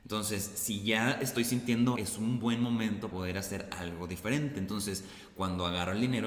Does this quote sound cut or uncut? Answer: cut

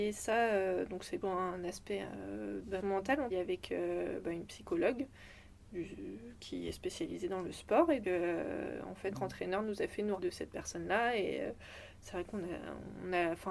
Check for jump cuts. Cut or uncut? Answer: cut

